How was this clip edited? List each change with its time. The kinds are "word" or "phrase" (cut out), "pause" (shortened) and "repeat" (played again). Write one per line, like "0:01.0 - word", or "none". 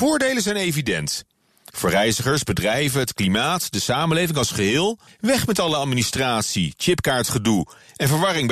0:05.1 - pause